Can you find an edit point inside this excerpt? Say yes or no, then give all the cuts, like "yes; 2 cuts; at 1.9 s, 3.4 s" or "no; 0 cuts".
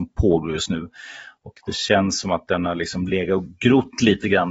no; 0 cuts